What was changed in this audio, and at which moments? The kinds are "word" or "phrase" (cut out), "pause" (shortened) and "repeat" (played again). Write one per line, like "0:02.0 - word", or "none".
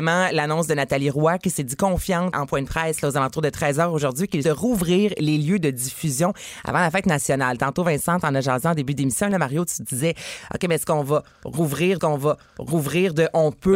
0:02.3 - word
0:04.4 - phrase
0:12.0 - repeat

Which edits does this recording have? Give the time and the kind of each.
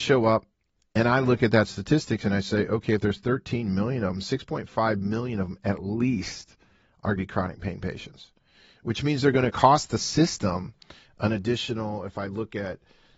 0:07.2 - phrase

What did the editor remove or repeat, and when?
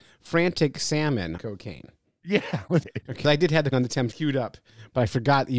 0:01.4 - word
0:02.8 - word
0:03.2 - word
0:03.7 - word
0:04.1 - word

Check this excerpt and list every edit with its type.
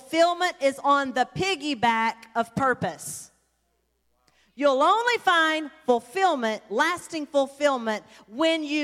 none

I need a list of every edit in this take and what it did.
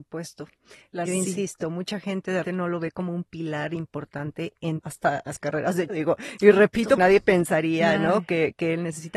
0:01.1 - word
0:02.4 - word
0:04.8 - word
0:05.3 - word
0:05.9 - word
0:07.0 - word

